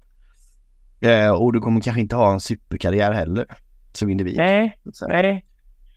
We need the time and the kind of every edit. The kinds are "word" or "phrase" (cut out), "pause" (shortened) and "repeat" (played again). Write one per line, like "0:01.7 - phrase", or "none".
none

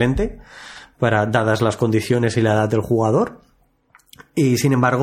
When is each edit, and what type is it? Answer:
none

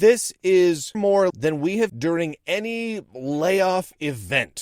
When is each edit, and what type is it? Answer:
0:00.9 - word
0:01.3 - word
0:01.9 - word

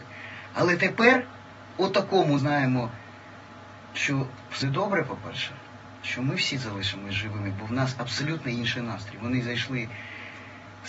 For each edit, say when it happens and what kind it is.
0:02.4 - phrase
0:04.6 - word

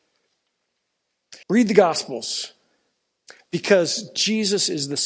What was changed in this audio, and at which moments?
0:01.4 - pause

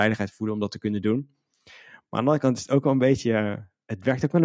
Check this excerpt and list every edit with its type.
none

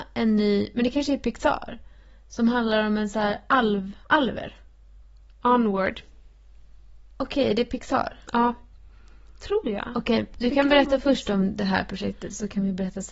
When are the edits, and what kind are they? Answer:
none

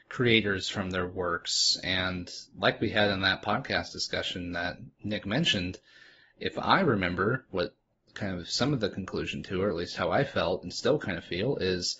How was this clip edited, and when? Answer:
none

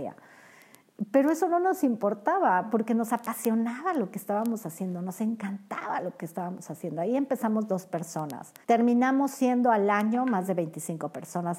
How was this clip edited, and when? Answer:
0:08.6 - pause

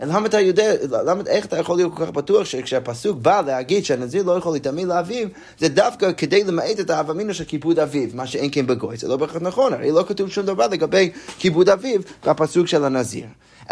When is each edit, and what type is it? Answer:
none

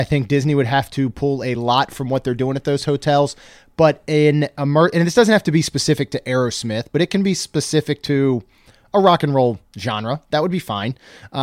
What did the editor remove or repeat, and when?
none

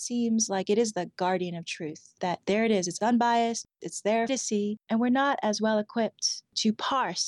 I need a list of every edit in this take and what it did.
0:04.3 - phrase
0:04.8 - pause

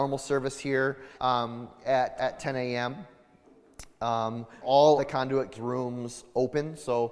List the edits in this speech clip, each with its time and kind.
0:01.1 - pause
0:02.2 - word
0:04.6 - word
0:05.0 - word
0:05.5 - word

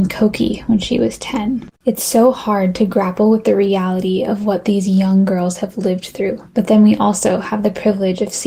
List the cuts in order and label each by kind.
0:01.8 - pause
0:06.5 - pause

